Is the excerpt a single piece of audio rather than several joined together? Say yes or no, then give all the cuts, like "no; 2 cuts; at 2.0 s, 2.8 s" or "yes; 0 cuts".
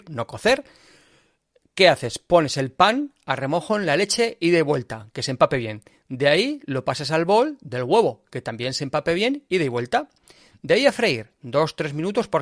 yes; 0 cuts